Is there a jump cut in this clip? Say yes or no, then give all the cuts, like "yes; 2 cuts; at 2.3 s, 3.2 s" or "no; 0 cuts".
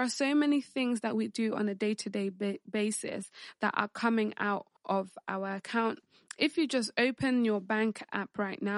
yes; 1 cut; at 4.8 s